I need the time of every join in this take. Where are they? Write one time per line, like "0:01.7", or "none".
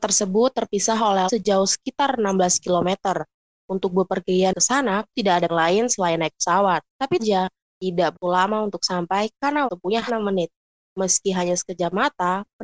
0:01.3
0:05.1
0:05.5
0:07.2
0:08.1
0:09.7
0:10.1